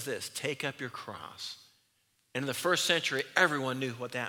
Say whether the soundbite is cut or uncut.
uncut